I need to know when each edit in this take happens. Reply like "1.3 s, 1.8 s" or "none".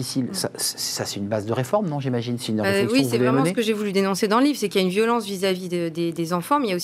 none